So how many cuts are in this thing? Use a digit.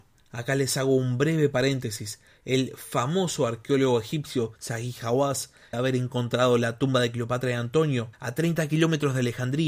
3